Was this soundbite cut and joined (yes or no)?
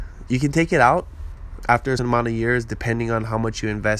yes